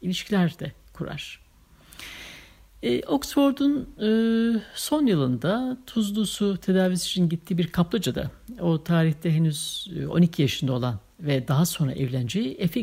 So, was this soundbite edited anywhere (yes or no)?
no